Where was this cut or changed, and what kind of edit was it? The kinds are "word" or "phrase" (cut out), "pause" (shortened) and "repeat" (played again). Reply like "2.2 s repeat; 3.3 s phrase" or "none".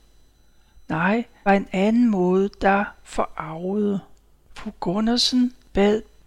1.5 s phrase